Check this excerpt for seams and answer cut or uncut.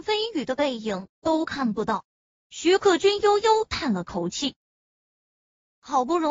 cut